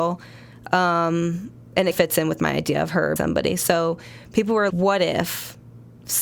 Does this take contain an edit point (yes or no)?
yes